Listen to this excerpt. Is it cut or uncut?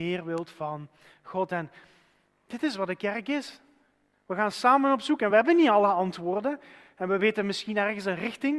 uncut